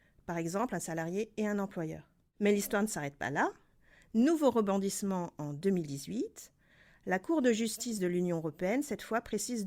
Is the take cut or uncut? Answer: uncut